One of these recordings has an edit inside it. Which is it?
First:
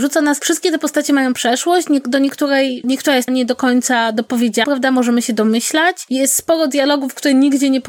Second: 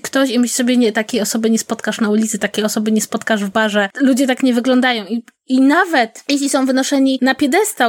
first; 3 cuts; at 2.8 s, 3.3 s, 4.6 s

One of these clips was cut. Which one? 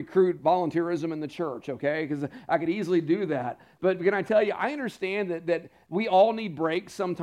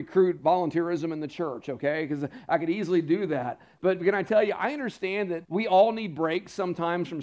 second; 1 cut; at 5.4 s

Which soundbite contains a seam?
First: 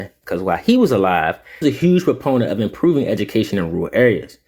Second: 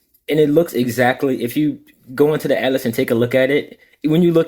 first; 1 cut; at 1.6 s

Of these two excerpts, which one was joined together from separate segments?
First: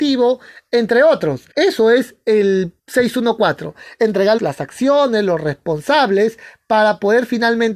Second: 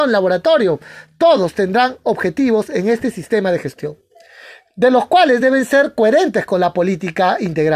first; 3 cuts; at 1.5 s, 2.8 s, 4.4 s

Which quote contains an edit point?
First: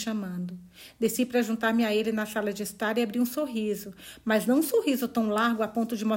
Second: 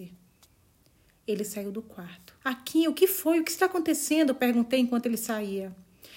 second; 1 cut; at 2.4 s

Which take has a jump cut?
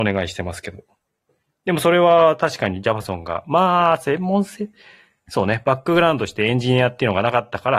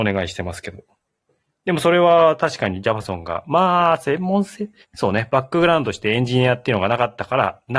second; 1 cut; at 4.8 s

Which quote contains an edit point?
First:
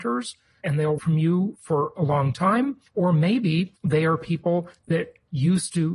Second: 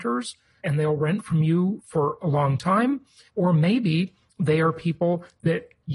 first; 3 cuts; at 1.0 s, 2.9 s, 3.8 s

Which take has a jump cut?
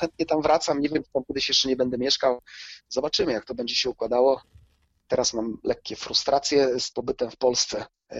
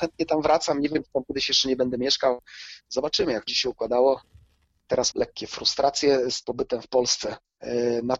second; 2 cuts; at 3.5 s, 5.1 s

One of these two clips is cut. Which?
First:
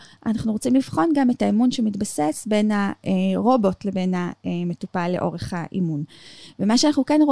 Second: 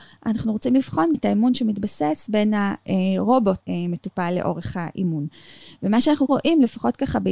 second; 3 cuts; at 1.1 s, 3.6 s, 6.3 s

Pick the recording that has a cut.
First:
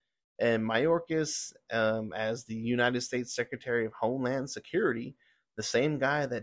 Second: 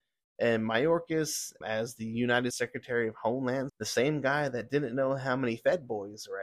second; 3 cuts; at 1.6 s, 2.5 s, 3.7 s

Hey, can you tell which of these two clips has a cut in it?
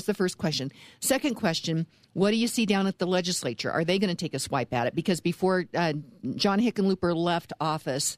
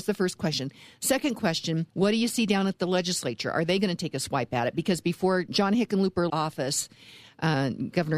second; 3 cuts; at 1.9 s, 5.5 s, 6.3 s

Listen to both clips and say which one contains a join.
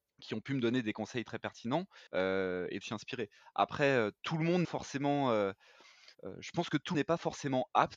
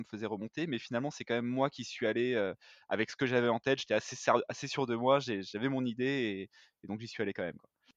first; 6 cuts; at 2.1 s, 2.8 s, 4.2 s, 4.6 s, 6.1 s, 6.9 s

